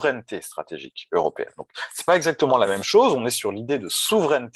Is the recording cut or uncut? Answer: uncut